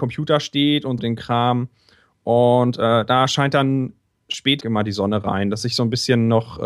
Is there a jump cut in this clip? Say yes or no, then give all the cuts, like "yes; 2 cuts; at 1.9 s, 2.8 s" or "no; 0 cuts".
yes; 2 cuts; at 1.0 s, 4.6 s